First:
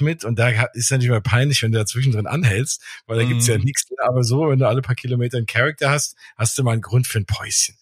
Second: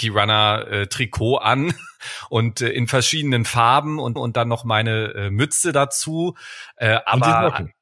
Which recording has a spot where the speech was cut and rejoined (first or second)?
second